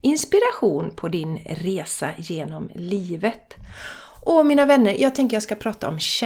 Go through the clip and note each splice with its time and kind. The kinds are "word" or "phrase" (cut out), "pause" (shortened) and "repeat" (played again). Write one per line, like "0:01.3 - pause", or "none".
none